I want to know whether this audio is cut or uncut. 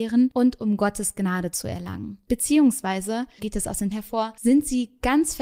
cut